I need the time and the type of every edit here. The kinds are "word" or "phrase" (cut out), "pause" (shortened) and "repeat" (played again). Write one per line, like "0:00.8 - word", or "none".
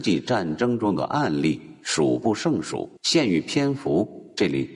0:03.0 - pause

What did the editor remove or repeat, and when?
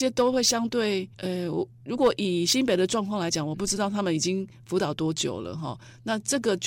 0:01.1 - pause

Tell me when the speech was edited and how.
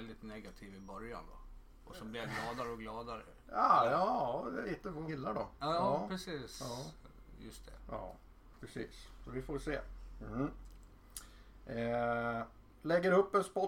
0:03.4 - pause
0:04.6 - word
0:05.1 - word

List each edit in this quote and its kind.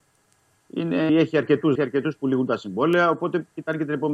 0:01.1 - word
0:01.8 - phrase

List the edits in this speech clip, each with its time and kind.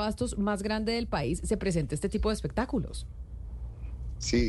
none

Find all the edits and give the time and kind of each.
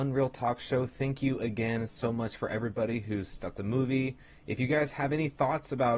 0:03.6 - phrase

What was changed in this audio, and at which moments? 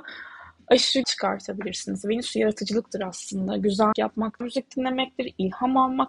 0:01.0 - phrase
0:03.9 - word
0:04.4 - word

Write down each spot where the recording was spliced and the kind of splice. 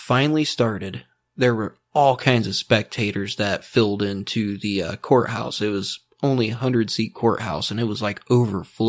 none

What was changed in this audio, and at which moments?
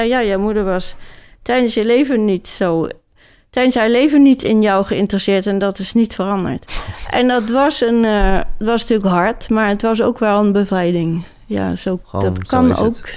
none

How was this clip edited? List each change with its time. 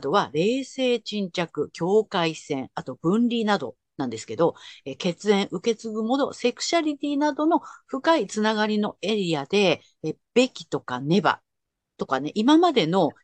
none

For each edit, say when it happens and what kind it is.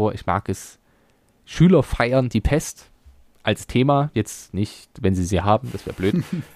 none

